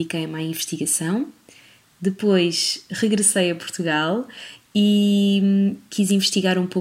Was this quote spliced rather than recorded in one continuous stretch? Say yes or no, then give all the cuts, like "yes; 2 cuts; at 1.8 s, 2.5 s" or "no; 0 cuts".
no; 0 cuts